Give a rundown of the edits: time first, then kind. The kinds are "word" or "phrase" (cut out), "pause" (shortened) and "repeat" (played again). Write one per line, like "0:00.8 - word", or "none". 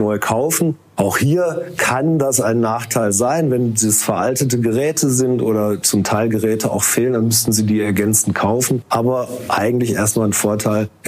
none